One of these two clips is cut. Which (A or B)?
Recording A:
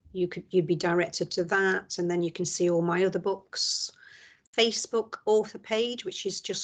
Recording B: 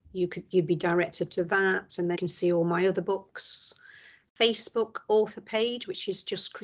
B